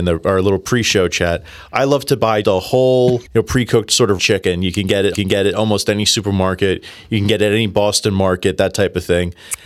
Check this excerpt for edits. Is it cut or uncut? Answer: cut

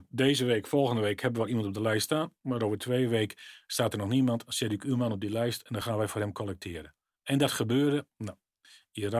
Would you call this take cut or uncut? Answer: uncut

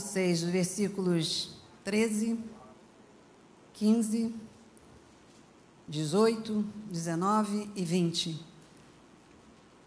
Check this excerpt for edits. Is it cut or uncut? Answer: uncut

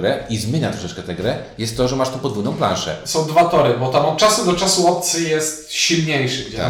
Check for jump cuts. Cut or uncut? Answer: uncut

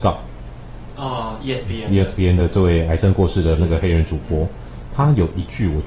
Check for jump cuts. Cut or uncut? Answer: uncut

